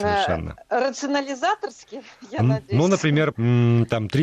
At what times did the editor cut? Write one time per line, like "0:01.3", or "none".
0:03.3